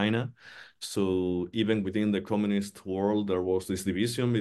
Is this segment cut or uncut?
uncut